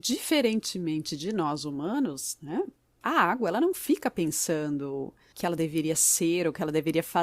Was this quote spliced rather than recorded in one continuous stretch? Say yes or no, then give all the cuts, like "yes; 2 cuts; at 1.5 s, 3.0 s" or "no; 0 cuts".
no; 0 cuts